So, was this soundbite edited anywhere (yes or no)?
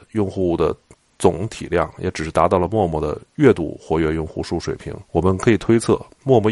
yes